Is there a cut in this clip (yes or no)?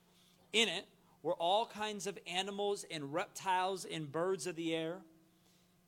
no